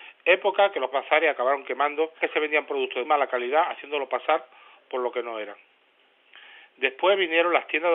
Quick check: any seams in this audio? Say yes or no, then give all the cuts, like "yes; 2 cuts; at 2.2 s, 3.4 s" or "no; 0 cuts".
yes; 3 cuts; at 0.9 s, 2.2 s, 3.0 s